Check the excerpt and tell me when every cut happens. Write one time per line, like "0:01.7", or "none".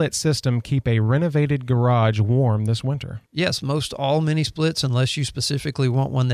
0:03.3